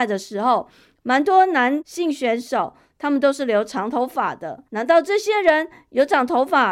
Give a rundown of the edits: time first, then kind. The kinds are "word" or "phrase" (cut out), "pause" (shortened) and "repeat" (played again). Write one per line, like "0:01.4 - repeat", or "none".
0:04.7 - pause